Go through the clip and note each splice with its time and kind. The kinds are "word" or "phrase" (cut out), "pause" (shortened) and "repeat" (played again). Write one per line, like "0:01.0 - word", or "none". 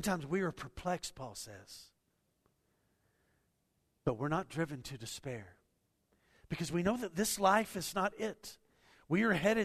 none